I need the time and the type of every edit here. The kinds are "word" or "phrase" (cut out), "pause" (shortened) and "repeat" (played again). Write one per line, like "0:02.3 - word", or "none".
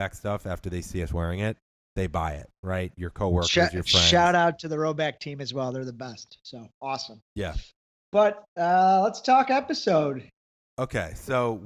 none